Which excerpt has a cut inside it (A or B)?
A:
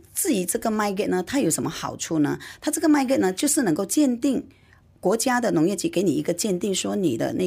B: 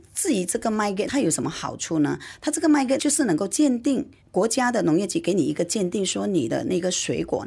B